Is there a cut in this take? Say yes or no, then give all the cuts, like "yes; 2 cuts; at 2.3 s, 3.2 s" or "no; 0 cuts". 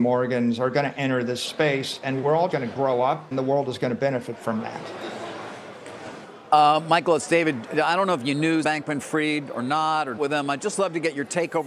yes; 4 cuts; at 2.5 s, 3.3 s, 8.6 s, 10.2 s